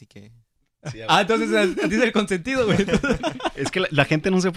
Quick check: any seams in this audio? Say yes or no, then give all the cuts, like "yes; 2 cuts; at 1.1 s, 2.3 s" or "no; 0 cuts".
no; 0 cuts